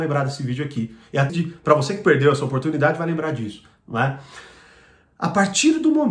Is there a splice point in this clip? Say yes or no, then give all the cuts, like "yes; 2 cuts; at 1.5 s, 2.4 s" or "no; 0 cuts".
yes; 1 cut; at 1.3 s